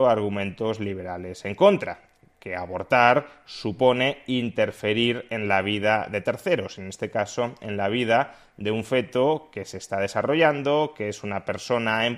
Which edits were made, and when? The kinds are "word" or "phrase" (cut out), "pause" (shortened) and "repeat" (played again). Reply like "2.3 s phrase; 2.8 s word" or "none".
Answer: none